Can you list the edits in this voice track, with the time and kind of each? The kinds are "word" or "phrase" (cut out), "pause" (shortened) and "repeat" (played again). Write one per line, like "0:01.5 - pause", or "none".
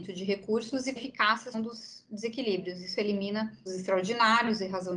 0:01.0 - word
0:01.5 - word
0:03.7 - word